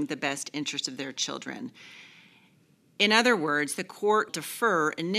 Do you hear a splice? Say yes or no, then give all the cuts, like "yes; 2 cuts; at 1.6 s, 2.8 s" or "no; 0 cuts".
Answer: yes; 1 cut; at 4.3 s